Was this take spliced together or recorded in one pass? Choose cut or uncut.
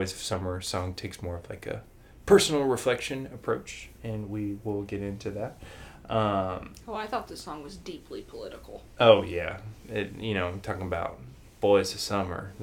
uncut